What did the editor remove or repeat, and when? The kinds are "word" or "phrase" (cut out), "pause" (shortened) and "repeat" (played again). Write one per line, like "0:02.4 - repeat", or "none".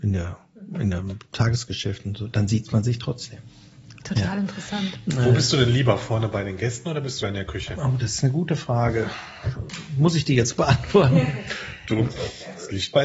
0:03.9 - pause
0:07.2 - word